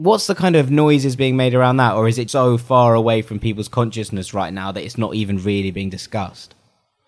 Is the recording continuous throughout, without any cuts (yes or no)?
no